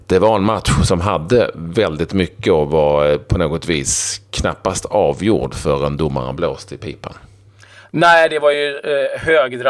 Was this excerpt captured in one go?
yes; 0 cuts

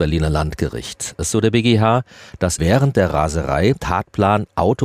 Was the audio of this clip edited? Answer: yes; 3 cuts; at 1.3 s, 2.6 s, 3.8 s

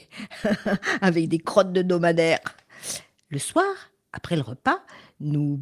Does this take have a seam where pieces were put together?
no; 0 cuts

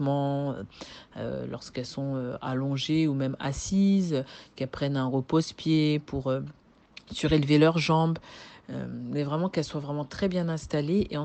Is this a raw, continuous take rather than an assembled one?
yes; 0 cuts

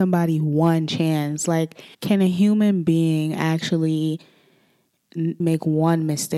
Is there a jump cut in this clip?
yes; 2 cuts; at 1.9 s, 5.4 s

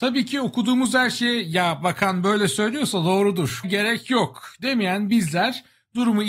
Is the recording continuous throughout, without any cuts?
no; 1 cut; at 3.6 s

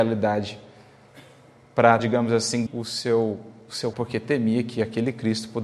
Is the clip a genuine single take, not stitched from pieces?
no; 3 cuts; at 2.0 s, 2.7 s, 3.9 s

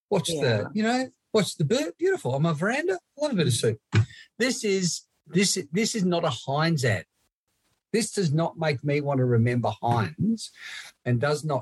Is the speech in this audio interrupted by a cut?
no; 0 cuts

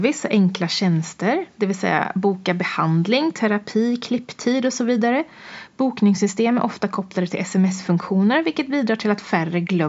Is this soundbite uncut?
yes; 0 cuts

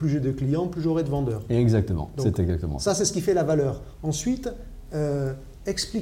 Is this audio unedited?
yes; 0 cuts

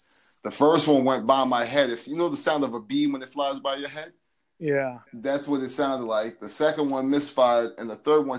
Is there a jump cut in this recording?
yes; 1 cut; at 5.1 s

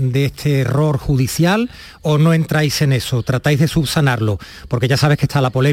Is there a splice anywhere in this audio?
no; 0 cuts

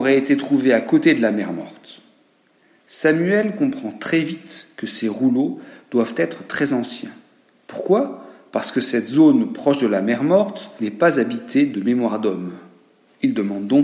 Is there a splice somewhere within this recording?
no; 0 cuts

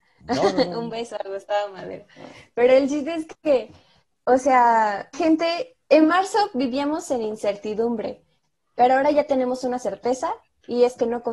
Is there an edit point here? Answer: yes; 1 cut; at 5.1 s

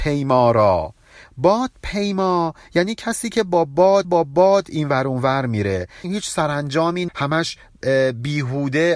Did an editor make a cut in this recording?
yes; 3 cuts; at 4.0 s, 6.0 s, 7.1 s

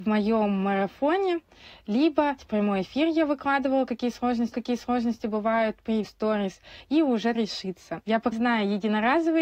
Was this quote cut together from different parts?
yes; 5 cuts; at 2.4 s, 4.5 s, 6.0 s, 7.3 s, 8.3 s

